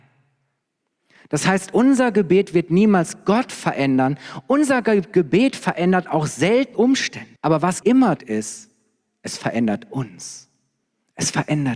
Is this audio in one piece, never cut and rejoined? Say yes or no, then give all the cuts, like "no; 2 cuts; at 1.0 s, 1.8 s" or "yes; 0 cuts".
no; 4 cuts; at 6.7 s, 7.4 s, 7.8 s, 8.2 s